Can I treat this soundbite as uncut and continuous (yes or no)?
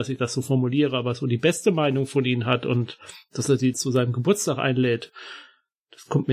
no